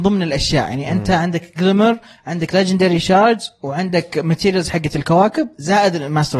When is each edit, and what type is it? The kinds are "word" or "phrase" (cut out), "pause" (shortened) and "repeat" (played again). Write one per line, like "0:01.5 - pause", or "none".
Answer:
none